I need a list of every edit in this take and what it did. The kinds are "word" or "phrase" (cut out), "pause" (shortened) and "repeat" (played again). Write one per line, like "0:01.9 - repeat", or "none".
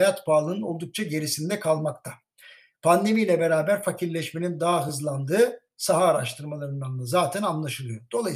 none